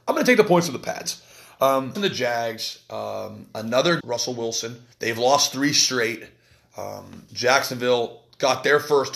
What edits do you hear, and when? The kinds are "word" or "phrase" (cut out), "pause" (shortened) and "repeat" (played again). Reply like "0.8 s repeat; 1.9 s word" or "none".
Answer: 1.9 s word; 4.0 s phrase; 4.9 s pause